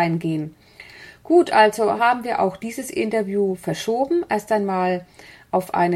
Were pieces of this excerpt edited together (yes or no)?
no